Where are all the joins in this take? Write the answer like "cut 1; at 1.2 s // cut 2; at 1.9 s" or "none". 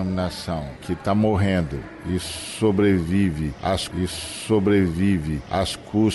cut 1; at 3.9 s